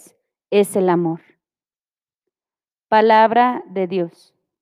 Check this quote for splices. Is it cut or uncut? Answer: uncut